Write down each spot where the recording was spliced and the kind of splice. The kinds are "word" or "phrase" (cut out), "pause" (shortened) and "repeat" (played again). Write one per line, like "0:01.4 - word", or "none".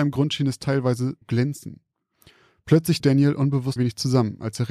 0:01.2 - word
0:03.0 - word
0:03.8 - word